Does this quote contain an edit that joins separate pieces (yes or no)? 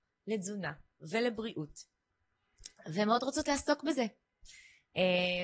no